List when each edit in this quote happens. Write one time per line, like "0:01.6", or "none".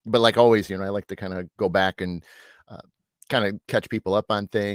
none